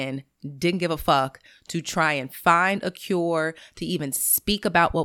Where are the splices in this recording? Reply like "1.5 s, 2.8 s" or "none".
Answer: none